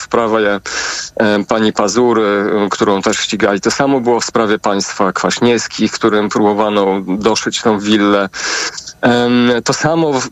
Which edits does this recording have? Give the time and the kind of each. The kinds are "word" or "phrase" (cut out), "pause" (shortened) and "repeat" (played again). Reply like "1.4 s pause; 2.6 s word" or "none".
none